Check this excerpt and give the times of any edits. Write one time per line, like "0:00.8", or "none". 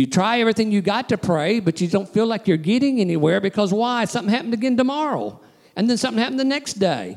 0:01.9